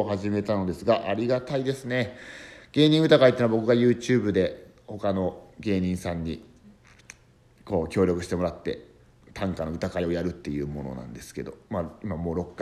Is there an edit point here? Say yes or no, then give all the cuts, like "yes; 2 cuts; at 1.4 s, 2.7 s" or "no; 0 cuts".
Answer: no; 0 cuts